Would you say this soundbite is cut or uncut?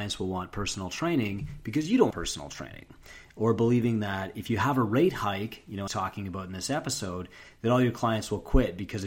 cut